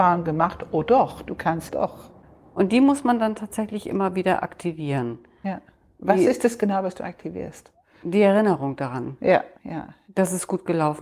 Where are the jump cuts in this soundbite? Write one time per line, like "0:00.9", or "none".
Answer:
0:01.7
0:09.6